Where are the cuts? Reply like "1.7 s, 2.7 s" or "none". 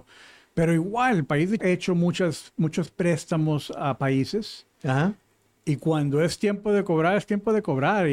1.6 s